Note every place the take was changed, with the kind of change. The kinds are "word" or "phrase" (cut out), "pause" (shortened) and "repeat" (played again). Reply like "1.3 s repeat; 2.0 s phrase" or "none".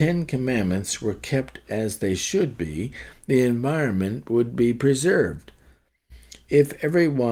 none